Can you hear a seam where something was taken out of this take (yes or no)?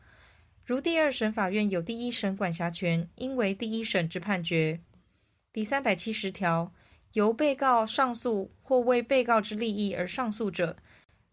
no